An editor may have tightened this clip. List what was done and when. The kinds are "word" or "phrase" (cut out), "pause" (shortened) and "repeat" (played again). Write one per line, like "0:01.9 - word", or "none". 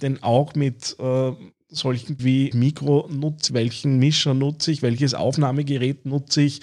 0:02.2 - word
0:02.5 - word
0:03.5 - word